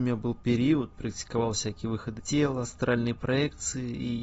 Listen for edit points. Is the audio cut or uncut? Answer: cut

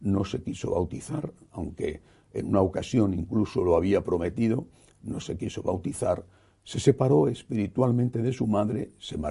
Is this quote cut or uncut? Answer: uncut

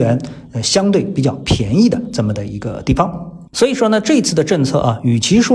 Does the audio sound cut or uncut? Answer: cut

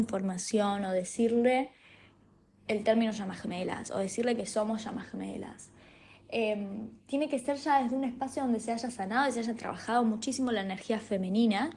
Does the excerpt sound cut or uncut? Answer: uncut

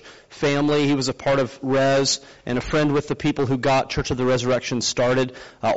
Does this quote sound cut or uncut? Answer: uncut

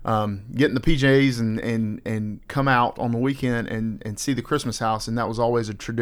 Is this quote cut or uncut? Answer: uncut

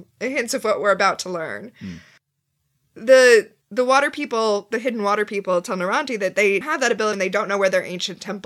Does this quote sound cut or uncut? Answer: cut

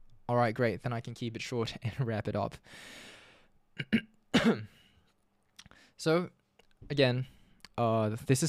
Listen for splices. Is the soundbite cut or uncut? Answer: uncut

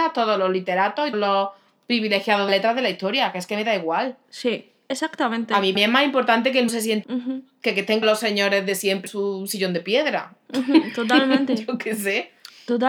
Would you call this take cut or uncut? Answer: cut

